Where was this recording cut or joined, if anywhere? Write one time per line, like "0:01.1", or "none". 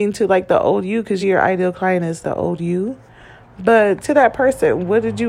0:01.2
0:02.2
0:04.0